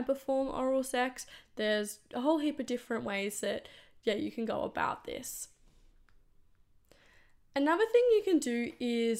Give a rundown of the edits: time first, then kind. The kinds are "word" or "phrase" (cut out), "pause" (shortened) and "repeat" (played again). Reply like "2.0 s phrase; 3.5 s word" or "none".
none